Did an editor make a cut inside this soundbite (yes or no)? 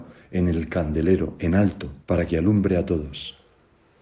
yes